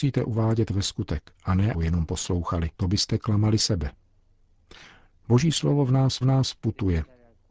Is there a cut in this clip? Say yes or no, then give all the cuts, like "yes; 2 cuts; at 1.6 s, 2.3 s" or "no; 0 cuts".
yes; 5 cuts; at 1.3 s, 1.7 s, 2.7 s, 3.6 s, 6.2 s